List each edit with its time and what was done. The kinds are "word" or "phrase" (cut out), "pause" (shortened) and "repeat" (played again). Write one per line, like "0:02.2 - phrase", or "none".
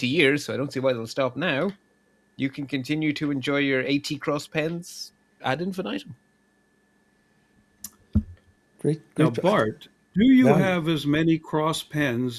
none